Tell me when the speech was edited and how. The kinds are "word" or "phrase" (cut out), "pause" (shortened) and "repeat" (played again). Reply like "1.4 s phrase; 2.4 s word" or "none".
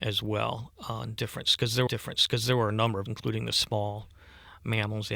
1.9 s repeat; 3.1 s word